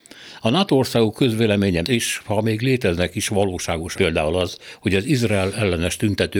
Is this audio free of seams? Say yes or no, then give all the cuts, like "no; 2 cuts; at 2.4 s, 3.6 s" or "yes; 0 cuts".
no; 2 cuts; at 1.8 s, 4.0 s